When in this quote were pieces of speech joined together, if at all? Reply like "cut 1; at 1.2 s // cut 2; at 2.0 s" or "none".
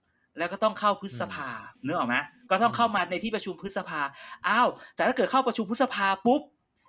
cut 1; at 1.8 s